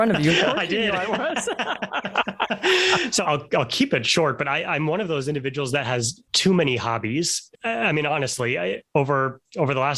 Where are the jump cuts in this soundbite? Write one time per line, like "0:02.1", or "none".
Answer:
0:06.3